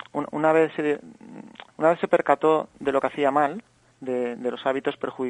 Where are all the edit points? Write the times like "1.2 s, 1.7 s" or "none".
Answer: 1.7 s, 3.9 s